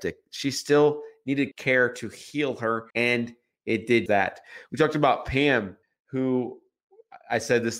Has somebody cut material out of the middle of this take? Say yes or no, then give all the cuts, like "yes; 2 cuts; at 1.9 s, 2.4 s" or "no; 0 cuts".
yes; 4 cuts; at 1.5 s, 2.9 s, 4.1 s, 5.8 s